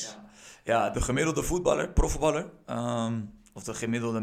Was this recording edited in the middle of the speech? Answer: yes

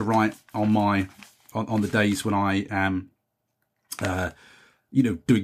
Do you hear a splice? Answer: no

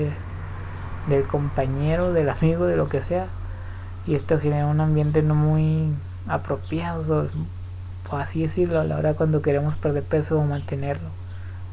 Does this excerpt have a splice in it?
no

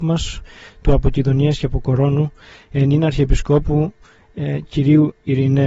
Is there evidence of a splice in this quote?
yes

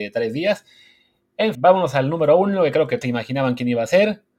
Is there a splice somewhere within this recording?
yes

